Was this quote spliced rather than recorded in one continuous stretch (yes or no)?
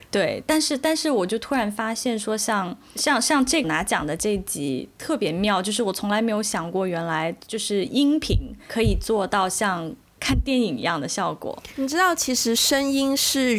yes